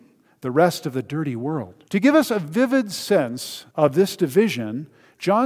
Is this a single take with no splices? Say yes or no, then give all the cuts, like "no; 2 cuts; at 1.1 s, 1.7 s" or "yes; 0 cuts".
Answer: no; 2 cuts; at 1.9 s, 3.7 s